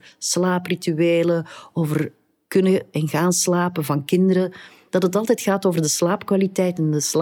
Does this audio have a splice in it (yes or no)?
no